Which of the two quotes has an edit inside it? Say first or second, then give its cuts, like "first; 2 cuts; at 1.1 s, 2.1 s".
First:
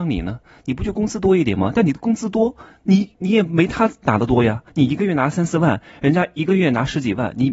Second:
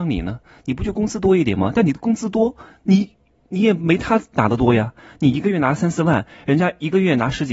first; 2 cuts; at 3.2 s, 4.7 s